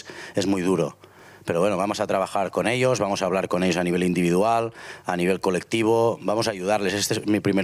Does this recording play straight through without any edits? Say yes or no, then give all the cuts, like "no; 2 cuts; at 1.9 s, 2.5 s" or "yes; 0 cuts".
yes; 0 cuts